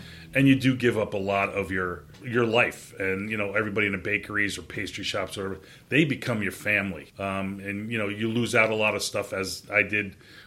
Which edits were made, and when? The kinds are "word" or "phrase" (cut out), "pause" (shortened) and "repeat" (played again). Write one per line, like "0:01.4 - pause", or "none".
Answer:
0:02.1 - pause
0:07.1 - pause